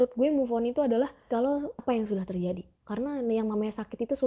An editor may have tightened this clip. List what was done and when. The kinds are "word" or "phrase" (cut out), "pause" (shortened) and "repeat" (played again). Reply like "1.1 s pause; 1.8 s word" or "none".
1.3 s phrase; 1.8 s word; 2.8 s pause